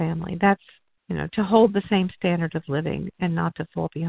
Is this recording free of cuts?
yes; 0 cuts

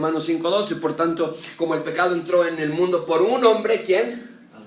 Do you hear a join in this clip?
no; 0 cuts

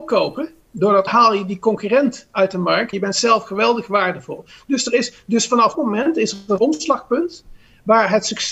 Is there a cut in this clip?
yes; 4 cuts; at 1.1 s, 2.9 s, 5.7 s, 6.6 s

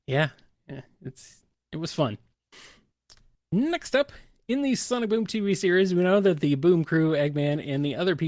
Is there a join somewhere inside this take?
no; 0 cuts

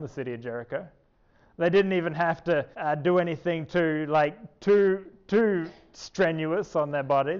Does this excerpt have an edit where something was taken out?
yes; 1 cut; at 2.7 s

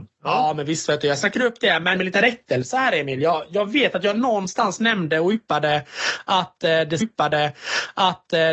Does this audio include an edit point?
yes; 2 cuts; at 2.0 s, 7.0 s

